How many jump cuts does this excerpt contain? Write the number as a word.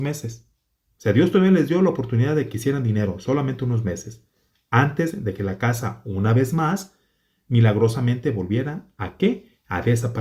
zero